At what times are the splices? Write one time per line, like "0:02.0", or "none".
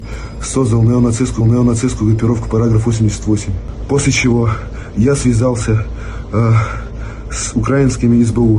0:01.4